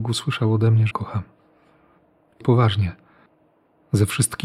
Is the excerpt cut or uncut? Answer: cut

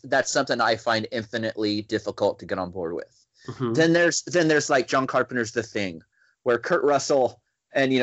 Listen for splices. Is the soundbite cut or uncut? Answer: uncut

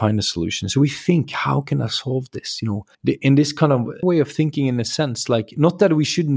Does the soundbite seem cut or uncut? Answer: cut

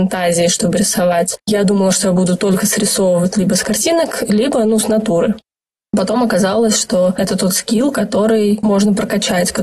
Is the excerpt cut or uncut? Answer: uncut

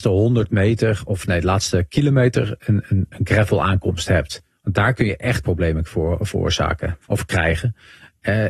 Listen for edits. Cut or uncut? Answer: cut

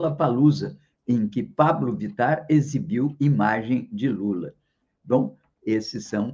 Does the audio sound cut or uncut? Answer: uncut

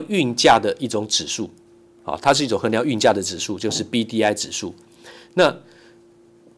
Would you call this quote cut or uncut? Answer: uncut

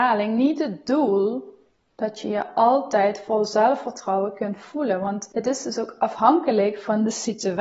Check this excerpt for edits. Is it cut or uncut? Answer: uncut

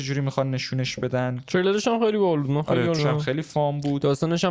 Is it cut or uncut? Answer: cut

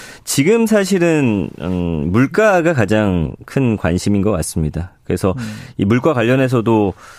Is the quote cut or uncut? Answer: uncut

